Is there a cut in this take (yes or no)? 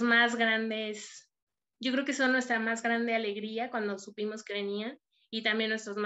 no